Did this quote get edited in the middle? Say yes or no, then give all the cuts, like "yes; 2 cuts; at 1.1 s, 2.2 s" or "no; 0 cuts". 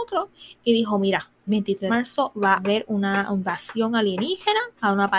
yes; 3 cuts; at 1.5 s, 1.9 s, 2.6 s